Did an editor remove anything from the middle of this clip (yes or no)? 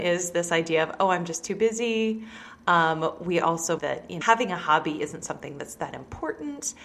yes